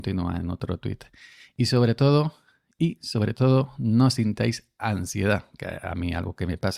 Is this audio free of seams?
yes; 0 cuts

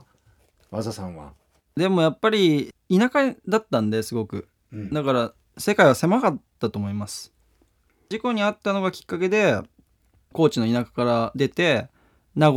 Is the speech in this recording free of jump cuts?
no; 1 cut; at 2.8 s

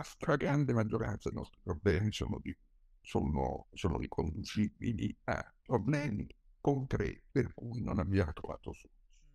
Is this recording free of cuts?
no; 2 cuts; at 1.3 s, 7.3 s

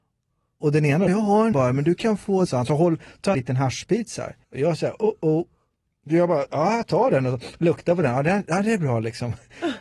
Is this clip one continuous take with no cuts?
no; 5 cuts; at 1.1 s, 1.5 s, 2.5 s, 3.3 s, 4.4 s

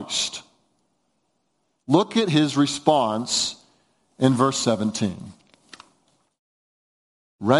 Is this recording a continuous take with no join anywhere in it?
yes; 0 cuts

